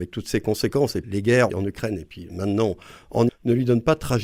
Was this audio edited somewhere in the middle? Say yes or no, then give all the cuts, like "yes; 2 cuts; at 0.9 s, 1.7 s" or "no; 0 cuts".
yes; 3 cuts; at 1.0 s, 1.5 s, 3.3 s